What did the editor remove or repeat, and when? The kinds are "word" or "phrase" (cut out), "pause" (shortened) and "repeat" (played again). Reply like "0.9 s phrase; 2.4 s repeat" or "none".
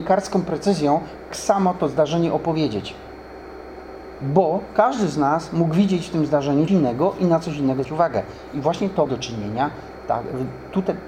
1.3 s word; 6.7 s word; 7.8 s word; 9.1 s word